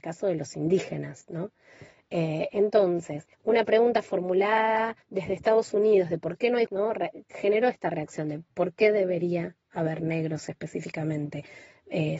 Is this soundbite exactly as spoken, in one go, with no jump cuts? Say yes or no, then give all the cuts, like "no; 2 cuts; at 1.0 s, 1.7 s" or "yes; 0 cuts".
no; 3 cuts; at 3.3 s, 5.0 s, 6.7 s